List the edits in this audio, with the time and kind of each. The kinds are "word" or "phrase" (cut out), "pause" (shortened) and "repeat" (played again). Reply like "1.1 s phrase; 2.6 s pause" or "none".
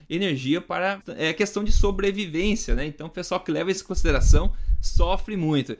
1.0 s phrase